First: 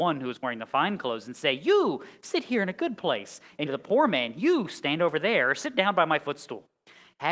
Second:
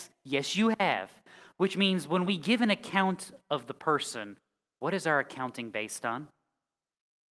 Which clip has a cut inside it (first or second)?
first